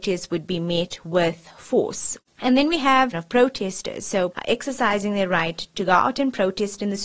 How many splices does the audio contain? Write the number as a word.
three